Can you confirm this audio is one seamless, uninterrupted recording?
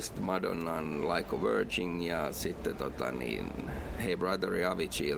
yes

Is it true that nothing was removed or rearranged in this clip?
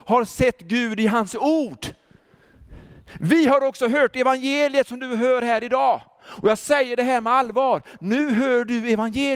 yes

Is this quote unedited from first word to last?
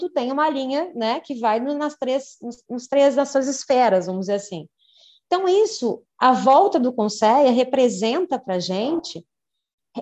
yes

